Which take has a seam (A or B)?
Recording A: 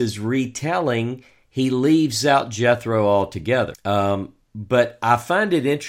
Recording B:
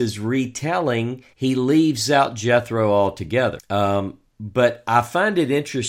B